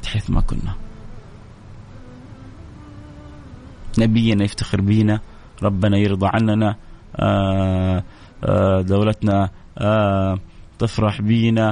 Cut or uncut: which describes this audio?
uncut